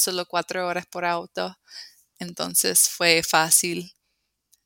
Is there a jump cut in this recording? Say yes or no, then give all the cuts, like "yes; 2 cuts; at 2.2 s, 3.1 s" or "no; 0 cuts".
no; 0 cuts